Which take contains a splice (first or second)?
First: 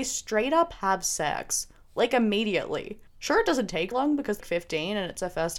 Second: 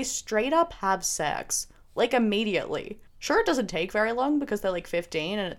first